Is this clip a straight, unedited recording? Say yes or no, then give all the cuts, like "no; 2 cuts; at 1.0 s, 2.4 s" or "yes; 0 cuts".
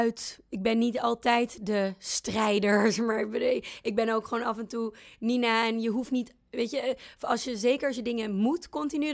yes; 0 cuts